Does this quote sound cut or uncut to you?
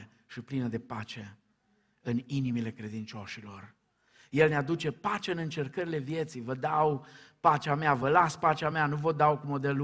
uncut